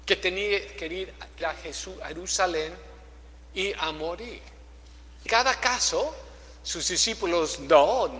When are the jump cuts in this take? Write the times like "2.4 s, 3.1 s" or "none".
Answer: 1.4 s, 5.3 s